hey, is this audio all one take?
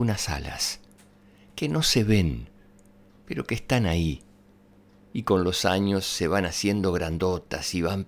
yes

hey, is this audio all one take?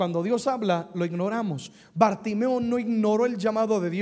yes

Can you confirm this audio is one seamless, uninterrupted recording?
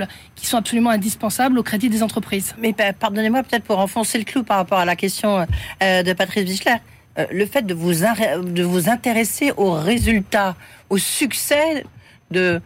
yes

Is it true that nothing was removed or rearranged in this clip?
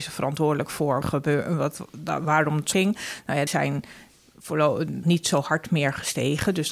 no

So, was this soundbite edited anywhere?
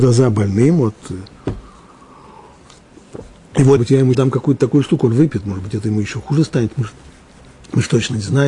yes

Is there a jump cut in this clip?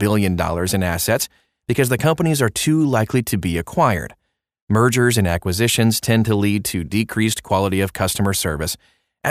no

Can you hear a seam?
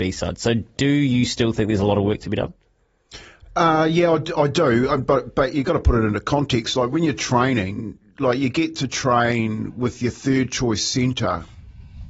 no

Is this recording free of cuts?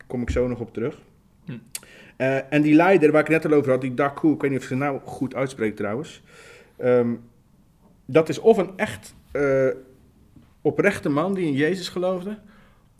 yes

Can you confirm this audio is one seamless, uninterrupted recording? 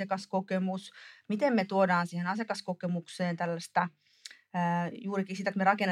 yes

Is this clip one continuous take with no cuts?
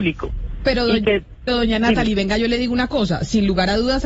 no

